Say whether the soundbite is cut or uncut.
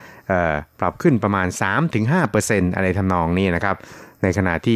uncut